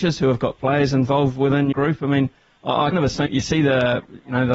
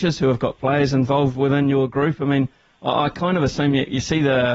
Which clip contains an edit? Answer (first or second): first